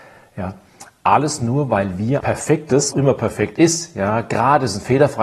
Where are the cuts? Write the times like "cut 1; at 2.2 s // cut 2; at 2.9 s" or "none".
cut 1; at 2.2 s // cut 2; at 2.9 s